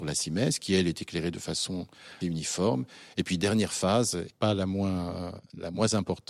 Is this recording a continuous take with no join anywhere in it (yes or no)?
no